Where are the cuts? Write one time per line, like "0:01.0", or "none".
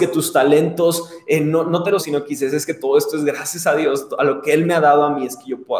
0:02.0